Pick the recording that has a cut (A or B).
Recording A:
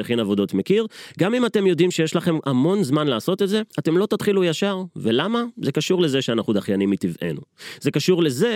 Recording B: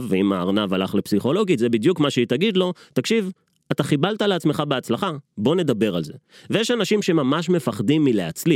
A